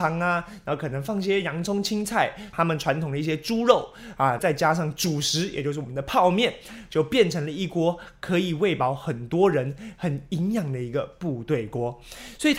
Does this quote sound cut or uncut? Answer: cut